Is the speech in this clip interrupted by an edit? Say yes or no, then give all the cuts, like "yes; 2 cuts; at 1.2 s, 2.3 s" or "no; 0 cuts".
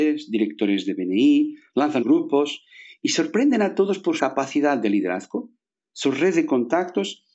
yes; 2 cuts; at 2.0 s, 4.2 s